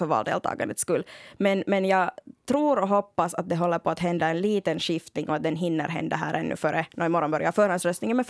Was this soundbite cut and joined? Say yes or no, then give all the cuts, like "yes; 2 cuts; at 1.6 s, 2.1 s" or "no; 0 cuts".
no; 0 cuts